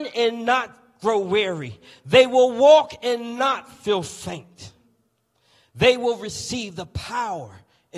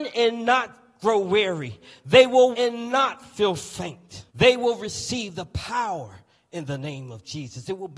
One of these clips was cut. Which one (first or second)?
second